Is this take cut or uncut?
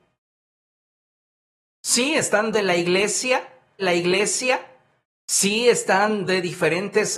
cut